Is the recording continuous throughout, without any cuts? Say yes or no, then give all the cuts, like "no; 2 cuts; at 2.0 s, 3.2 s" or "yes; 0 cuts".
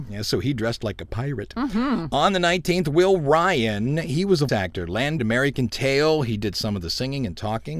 no; 2 cuts; at 4.5 s, 5.2 s